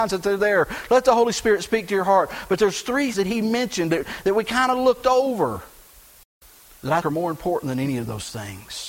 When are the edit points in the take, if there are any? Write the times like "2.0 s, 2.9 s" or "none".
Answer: 3.1 s, 7.0 s